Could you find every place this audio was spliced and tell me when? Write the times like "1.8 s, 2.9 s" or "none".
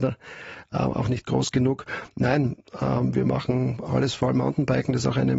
none